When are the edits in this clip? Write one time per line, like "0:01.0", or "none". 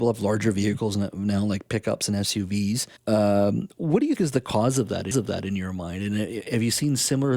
0:03.0
0:04.2
0:05.1